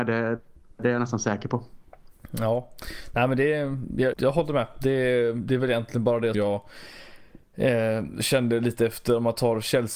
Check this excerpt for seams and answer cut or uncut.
cut